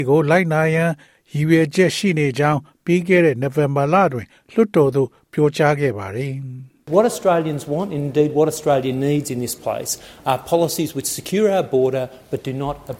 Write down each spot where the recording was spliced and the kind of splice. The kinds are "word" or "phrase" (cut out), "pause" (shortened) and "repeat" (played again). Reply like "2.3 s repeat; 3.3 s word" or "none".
none